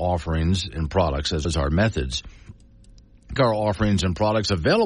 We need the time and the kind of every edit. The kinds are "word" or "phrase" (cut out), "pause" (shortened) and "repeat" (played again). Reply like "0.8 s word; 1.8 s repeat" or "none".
1.4 s word; 3.4 s phrase